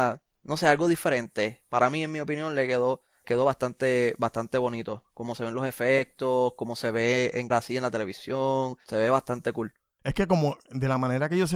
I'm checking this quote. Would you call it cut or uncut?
cut